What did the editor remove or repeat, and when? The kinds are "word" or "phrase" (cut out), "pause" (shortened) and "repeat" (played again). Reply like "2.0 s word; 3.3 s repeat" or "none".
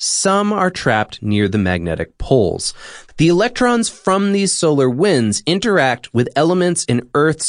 none